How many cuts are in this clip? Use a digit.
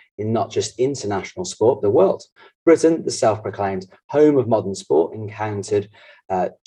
1